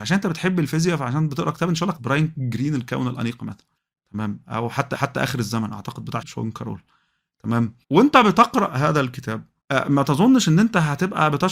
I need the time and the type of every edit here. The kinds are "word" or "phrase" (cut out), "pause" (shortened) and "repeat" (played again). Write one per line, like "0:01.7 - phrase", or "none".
0:02.0 - phrase
0:03.8 - pause
0:04.9 - repeat
0:06.2 - word
0:07.8 - pause
0:09.6 - pause